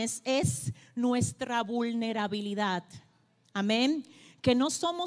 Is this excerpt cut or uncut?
uncut